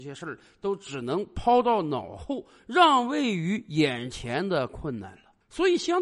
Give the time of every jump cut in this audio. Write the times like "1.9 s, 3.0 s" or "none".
none